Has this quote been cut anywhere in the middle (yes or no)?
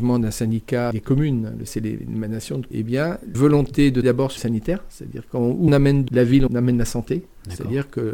yes